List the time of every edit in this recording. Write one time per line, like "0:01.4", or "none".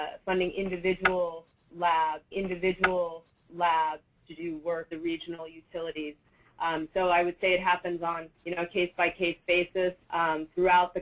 0:02.3
0:04.9
0:08.3
0:10.0